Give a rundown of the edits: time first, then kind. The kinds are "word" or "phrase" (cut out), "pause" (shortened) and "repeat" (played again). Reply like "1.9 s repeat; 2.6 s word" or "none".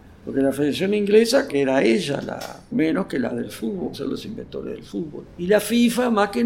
1.5 s word; 2.7 s word; 3.3 s word; 3.9 s word